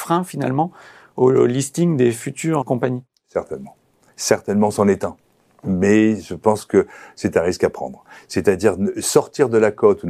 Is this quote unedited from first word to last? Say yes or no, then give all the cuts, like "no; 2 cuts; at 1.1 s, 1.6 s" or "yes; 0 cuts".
no; 1 cut; at 2.6 s